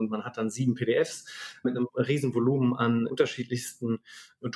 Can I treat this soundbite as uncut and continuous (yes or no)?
yes